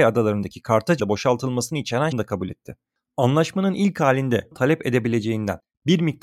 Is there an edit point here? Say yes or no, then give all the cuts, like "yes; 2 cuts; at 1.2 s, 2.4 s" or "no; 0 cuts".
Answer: yes; 3 cuts; at 1.0 s, 2.1 s, 4.5 s